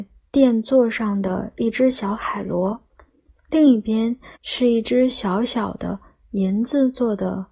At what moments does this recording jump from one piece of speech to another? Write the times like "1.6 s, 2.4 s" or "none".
4.4 s